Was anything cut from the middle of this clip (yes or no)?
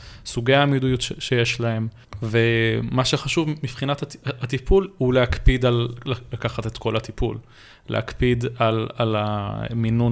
no